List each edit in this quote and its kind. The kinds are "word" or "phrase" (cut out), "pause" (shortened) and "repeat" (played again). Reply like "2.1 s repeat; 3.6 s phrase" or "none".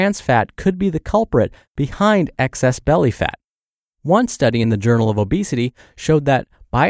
none